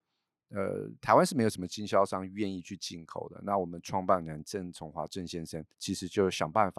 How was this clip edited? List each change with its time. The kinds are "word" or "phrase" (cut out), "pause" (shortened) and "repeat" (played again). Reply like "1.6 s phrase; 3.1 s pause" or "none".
5.7 s pause